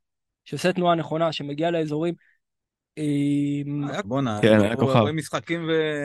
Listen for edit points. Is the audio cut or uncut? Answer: cut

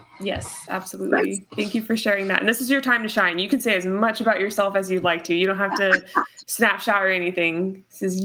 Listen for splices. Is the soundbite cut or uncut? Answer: cut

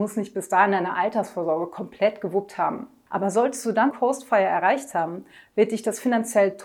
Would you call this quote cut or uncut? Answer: cut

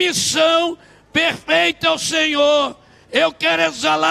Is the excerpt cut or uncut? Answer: uncut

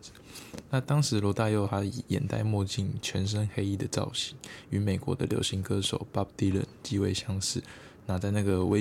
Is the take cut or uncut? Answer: uncut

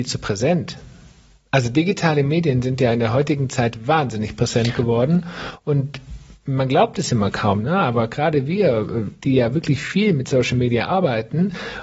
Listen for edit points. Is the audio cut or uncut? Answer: uncut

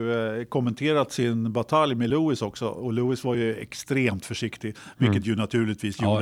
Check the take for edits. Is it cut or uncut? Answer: uncut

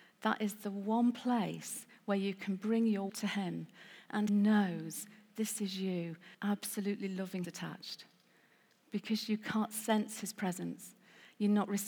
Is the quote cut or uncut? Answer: cut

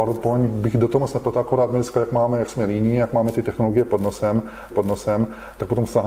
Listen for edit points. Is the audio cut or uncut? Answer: cut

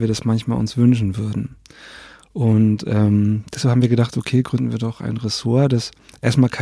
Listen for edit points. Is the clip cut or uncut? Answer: uncut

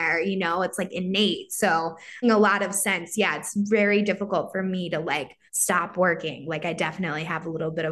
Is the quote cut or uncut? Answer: cut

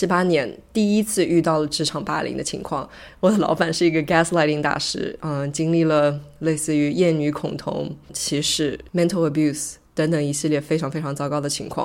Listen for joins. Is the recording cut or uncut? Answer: uncut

